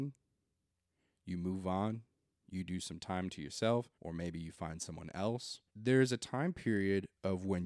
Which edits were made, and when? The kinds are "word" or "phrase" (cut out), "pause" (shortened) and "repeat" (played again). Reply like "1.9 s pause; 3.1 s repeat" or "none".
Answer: 3.9 s pause; 5.7 s pause